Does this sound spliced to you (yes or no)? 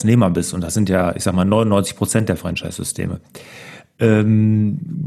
no